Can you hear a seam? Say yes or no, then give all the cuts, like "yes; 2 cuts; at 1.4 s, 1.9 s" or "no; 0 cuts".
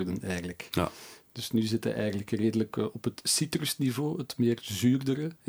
no; 0 cuts